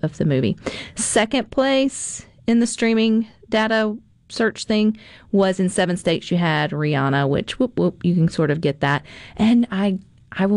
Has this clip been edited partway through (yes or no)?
no